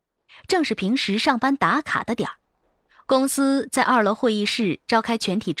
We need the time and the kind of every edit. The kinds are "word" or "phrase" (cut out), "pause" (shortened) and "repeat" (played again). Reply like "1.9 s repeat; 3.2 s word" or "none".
none